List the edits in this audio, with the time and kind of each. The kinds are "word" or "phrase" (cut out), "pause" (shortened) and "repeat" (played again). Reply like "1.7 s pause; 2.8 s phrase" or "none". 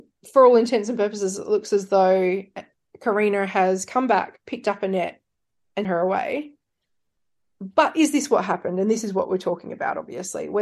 5.8 s word